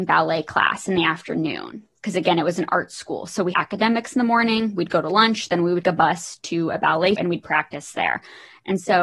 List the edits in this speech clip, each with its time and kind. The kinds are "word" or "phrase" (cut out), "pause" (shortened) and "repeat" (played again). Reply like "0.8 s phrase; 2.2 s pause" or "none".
3.5 s word; 5.8 s word; 7.2 s word